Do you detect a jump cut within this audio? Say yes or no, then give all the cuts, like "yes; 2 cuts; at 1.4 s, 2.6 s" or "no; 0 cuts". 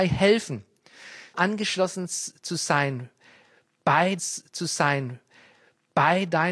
yes; 2 cuts; at 1.3 s, 4.2 s